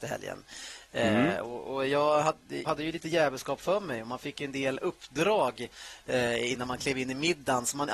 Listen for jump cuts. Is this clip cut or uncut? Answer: cut